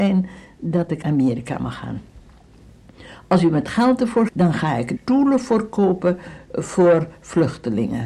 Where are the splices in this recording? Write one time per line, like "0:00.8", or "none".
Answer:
0:01.0
0:04.3
0:05.0